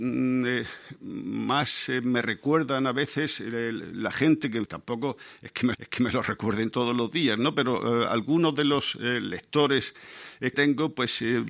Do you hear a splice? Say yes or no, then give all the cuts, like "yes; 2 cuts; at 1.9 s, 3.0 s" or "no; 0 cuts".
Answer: yes; 3 cuts; at 4.7 s, 5.7 s, 10.5 s